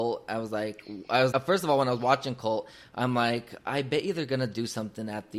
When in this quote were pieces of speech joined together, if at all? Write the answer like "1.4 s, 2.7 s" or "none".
1.3 s